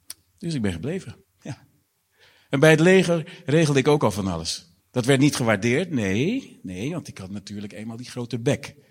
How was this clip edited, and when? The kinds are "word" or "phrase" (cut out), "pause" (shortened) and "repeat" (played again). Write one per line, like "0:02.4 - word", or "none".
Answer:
0:01.2 - pause
0:04.8 - pause